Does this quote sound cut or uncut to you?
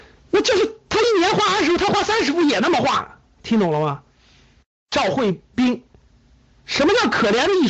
uncut